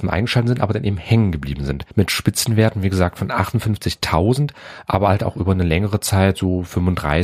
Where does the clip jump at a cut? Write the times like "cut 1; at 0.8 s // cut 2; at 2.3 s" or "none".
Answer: cut 1; at 1.9 s